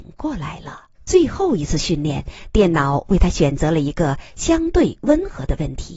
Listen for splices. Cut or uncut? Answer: cut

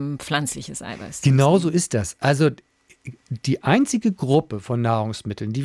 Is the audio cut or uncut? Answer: uncut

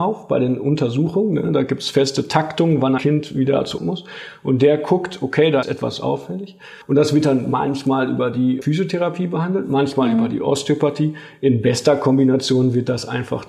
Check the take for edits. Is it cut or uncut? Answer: cut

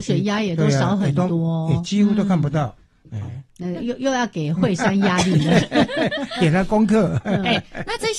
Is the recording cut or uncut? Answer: cut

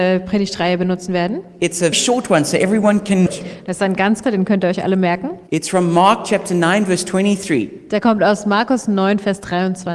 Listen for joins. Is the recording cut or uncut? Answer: cut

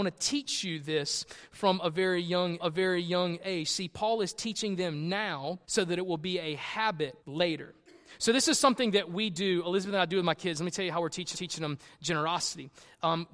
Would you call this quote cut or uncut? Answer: cut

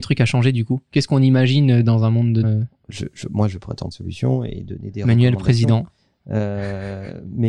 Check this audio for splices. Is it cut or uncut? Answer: cut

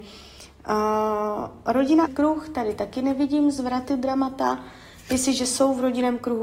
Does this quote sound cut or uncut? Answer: cut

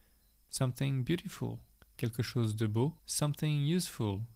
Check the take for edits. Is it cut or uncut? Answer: cut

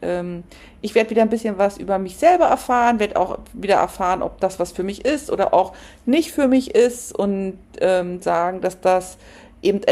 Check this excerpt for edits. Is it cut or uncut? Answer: cut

